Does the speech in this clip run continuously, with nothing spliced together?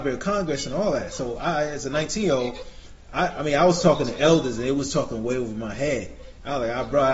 yes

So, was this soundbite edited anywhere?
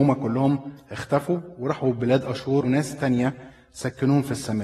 yes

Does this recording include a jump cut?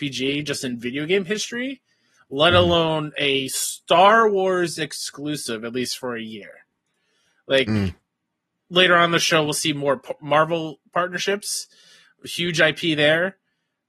no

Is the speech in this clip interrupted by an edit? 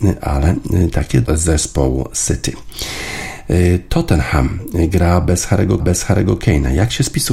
yes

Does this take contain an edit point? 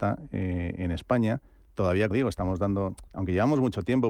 yes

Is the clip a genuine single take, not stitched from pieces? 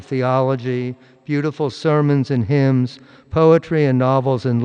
yes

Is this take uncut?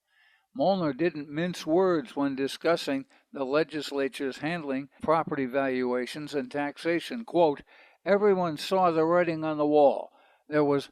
no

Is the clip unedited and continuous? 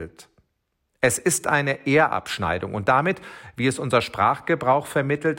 yes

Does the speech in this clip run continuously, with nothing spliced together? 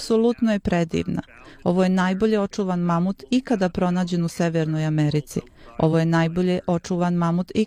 yes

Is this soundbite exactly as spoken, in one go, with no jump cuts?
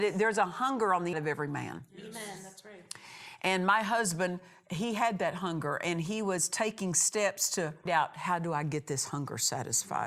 no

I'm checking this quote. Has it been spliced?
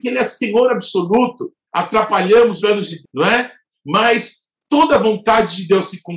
yes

